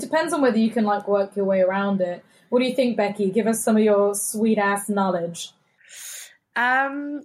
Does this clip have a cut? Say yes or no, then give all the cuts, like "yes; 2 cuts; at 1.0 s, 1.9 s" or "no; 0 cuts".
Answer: no; 0 cuts